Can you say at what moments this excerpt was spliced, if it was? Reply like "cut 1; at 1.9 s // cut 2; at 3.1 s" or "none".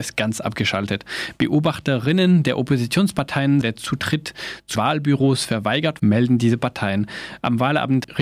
cut 1; at 3.6 s // cut 2; at 4.8 s // cut 3; at 6.0 s